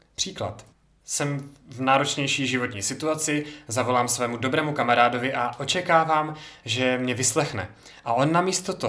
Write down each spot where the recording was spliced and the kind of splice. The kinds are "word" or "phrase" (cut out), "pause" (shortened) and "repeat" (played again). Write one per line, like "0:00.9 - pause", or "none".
none